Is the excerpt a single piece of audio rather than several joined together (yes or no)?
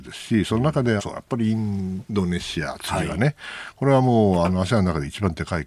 no